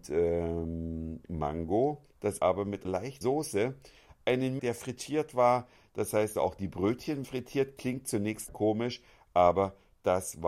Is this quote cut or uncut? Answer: cut